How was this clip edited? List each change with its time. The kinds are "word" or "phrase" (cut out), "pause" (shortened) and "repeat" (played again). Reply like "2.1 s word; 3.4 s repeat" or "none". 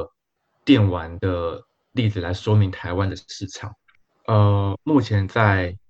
none